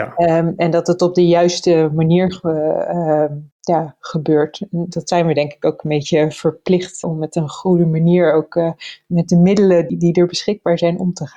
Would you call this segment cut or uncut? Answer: cut